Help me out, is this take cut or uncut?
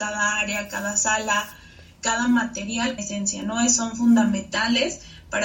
cut